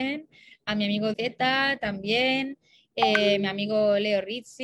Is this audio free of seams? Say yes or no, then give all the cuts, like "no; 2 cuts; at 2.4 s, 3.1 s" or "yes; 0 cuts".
no; 1 cut; at 1.1 s